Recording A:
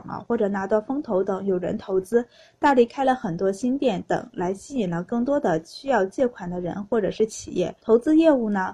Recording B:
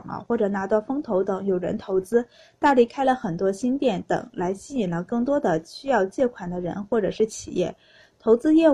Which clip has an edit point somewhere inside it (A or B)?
A